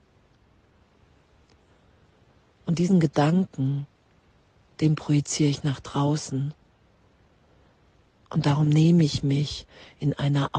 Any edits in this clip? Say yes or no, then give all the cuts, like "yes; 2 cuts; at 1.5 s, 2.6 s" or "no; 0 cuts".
no; 0 cuts